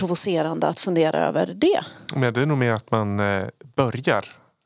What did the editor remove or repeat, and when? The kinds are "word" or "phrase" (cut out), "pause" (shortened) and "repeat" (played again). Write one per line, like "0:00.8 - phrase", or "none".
none